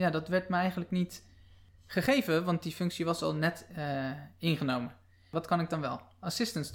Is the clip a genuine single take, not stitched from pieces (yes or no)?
yes